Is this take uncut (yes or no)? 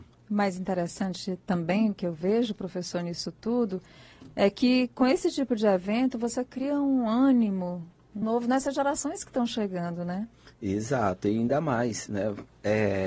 no